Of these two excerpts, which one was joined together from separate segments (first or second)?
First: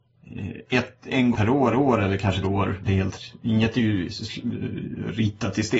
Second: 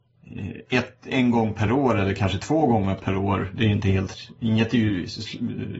first